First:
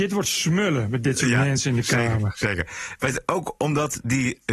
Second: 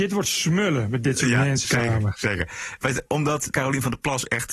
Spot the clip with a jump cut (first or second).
second